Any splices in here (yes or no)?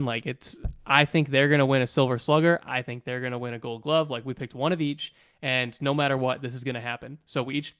no